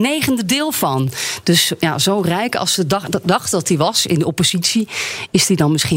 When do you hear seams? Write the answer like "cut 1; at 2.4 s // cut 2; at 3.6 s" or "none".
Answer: none